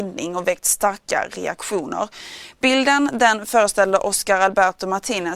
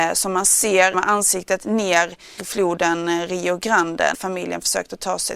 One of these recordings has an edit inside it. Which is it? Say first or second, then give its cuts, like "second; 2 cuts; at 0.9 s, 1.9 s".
second; 3 cuts; at 0.9 s, 2.4 s, 4.1 s